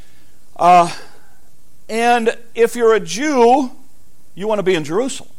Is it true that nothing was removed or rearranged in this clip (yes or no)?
yes